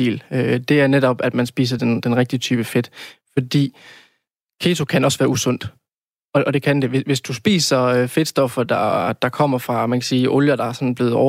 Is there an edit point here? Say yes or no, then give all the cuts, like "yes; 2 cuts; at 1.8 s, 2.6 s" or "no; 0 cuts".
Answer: no; 0 cuts